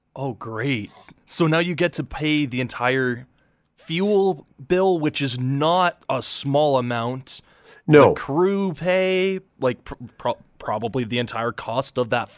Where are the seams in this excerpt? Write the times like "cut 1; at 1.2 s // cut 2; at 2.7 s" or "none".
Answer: none